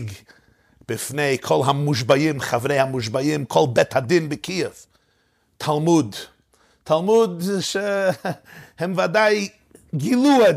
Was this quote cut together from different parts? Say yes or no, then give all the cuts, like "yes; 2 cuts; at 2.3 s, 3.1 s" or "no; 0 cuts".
no; 0 cuts